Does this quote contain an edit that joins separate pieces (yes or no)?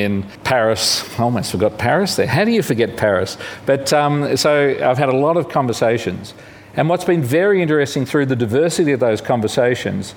no